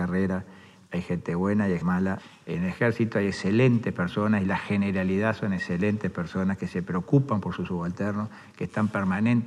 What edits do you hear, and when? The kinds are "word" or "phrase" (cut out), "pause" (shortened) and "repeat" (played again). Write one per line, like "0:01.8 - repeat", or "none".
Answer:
0:01.8 - word